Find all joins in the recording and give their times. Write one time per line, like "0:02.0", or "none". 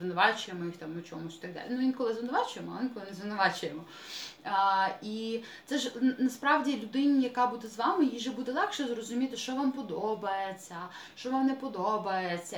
none